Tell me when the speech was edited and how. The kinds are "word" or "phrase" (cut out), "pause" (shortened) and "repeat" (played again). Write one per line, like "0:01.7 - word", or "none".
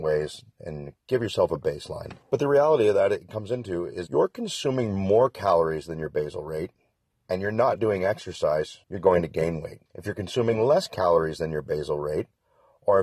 0:02.2 - pause
0:04.1 - word
0:08.8 - pause
0:09.9 - pause